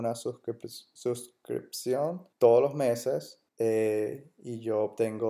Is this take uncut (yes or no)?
no